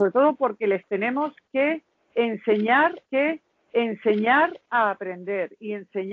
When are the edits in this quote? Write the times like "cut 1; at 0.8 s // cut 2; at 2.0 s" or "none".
cut 1; at 3.0 s